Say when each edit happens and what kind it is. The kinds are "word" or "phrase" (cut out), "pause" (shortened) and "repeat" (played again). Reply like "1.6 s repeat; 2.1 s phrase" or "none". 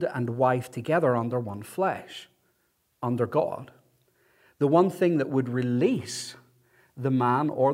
none